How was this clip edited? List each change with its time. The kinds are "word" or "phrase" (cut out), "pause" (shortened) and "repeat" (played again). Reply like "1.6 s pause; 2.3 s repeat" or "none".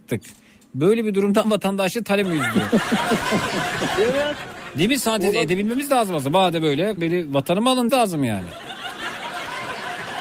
1.4 s word; 2.2 s word; 7.0 s word; 7.9 s word